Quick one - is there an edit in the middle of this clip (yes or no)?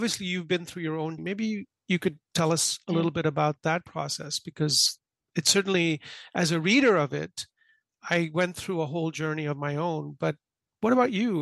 yes